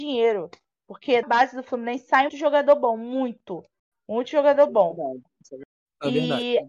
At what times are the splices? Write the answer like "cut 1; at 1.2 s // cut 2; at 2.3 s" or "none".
cut 1; at 1.2 s // cut 2; at 2.3 s